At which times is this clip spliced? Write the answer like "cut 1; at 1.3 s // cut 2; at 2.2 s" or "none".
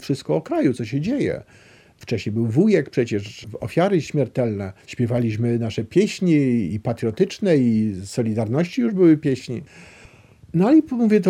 cut 1; at 4.8 s